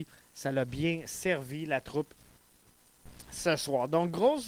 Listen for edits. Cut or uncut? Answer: uncut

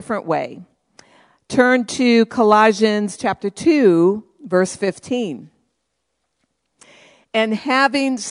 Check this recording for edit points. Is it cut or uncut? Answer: uncut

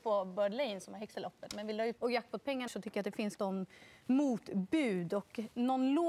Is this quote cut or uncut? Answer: cut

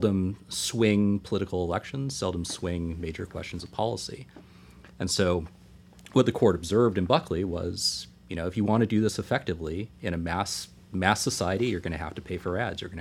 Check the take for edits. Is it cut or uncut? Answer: uncut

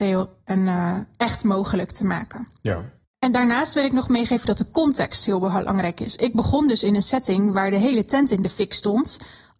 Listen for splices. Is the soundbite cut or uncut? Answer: uncut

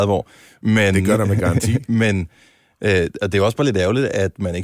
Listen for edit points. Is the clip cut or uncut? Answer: uncut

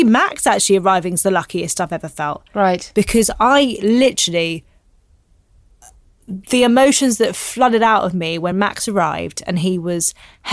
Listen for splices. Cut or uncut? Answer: uncut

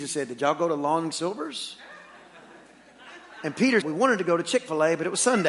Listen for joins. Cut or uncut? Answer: cut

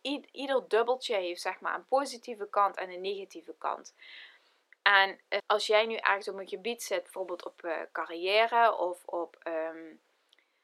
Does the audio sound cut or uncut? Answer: cut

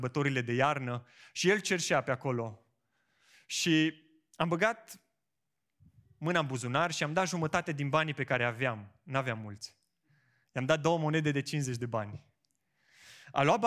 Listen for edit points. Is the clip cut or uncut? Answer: uncut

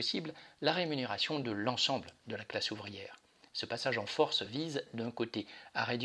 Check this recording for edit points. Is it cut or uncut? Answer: uncut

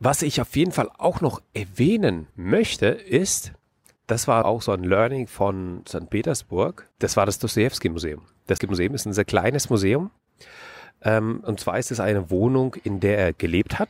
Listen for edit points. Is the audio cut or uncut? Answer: cut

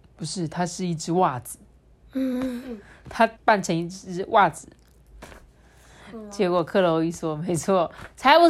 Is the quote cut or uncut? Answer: cut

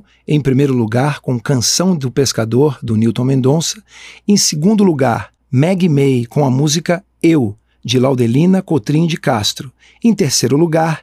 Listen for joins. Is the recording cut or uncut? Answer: uncut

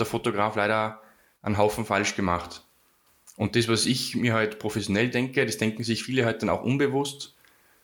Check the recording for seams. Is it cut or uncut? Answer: uncut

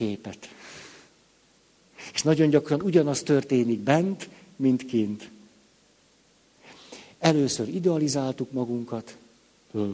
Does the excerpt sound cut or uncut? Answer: uncut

